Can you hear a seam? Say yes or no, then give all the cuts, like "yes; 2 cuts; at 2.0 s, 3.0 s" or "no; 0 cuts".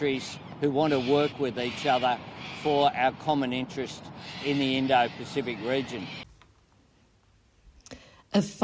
no; 0 cuts